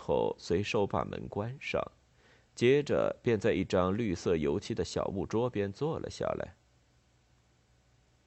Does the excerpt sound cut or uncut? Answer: uncut